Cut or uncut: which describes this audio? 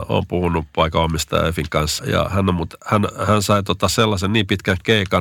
cut